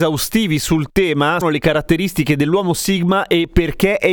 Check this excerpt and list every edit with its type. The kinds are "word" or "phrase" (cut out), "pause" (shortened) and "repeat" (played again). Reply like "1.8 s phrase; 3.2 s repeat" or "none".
1.4 s phrase